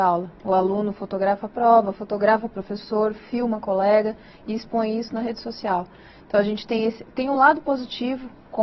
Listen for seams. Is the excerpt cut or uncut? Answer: uncut